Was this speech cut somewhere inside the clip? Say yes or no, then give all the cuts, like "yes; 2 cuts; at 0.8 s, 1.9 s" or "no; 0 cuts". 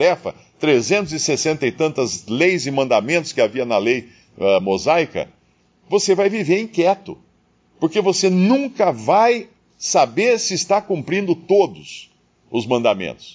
no; 0 cuts